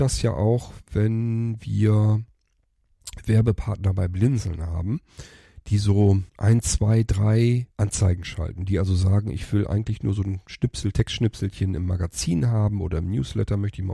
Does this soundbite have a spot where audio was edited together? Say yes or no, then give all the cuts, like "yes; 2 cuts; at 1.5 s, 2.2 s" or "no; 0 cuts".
yes; 2 cuts; at 6.3 s, 7.7 s